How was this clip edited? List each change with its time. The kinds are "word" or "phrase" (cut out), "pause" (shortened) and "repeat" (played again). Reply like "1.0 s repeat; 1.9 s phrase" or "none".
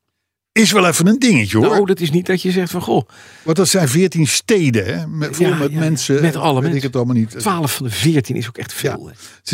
none